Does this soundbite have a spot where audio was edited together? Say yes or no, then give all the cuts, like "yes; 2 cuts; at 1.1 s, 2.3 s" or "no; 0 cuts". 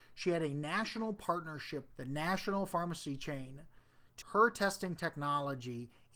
yes; 2 cuts; at 1.9 s, 4.2 s